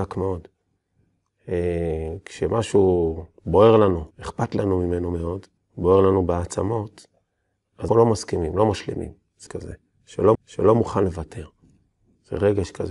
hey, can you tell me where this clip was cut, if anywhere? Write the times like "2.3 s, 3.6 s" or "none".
4.1 s, 5.6 s, 7.9 s, 9.5 s, 10.3 s